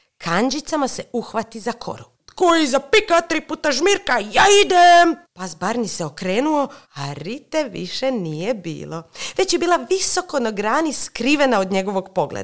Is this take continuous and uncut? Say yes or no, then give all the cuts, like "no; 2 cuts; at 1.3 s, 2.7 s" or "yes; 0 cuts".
no; 3 cuts; at 2.1 s, 5.2 s, 6.8 s